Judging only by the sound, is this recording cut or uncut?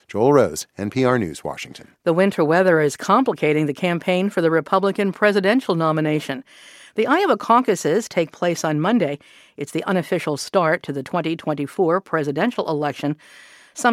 uncut